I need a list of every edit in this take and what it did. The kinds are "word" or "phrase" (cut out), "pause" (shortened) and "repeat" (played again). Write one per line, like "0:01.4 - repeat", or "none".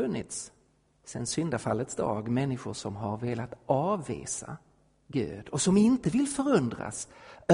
none